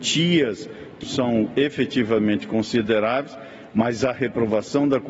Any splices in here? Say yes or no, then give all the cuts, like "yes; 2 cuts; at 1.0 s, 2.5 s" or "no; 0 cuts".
yes; 1 cut; at 1.0 s